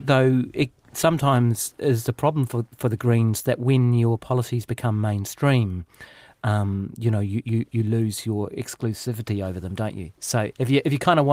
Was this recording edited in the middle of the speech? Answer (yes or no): no